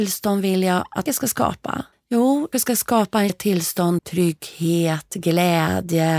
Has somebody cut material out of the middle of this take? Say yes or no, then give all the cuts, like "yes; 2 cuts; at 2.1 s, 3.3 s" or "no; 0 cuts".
yes; 5 cuts; at 1.1 s, 1.9 s, 2.5 s, 3.3 s, 4.0 s